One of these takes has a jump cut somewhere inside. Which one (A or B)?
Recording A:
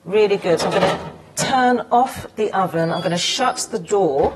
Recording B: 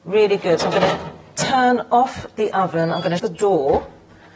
B